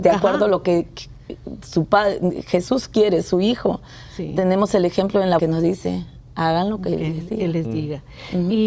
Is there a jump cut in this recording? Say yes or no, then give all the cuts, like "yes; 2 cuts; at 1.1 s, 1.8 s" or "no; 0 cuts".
yes; 1 cut; at 5.4 s